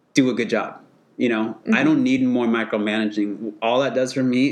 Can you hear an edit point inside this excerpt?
no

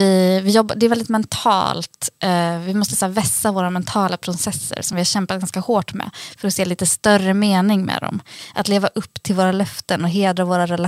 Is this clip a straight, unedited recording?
yes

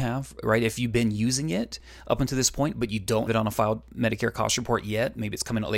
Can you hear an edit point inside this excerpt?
yes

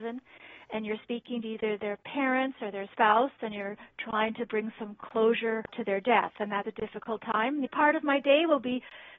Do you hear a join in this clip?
yes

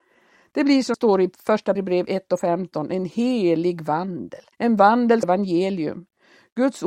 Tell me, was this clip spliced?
yes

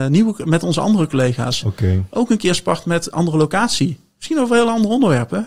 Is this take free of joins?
no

